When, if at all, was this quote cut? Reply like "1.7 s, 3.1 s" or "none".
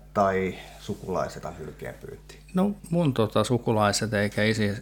1.4 s, 2.8 s